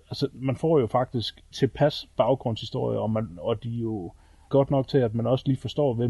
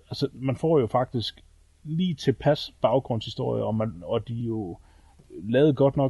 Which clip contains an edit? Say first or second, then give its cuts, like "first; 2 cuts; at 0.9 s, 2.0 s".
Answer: first; 2 cuts; at 1.5 s, 4.5 s